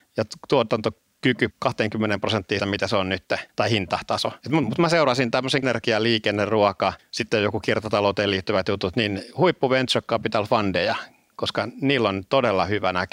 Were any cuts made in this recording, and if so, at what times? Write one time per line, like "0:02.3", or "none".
0:01.5
0:02.6
0:03.5
0:04.4
0:05.6
0:07.0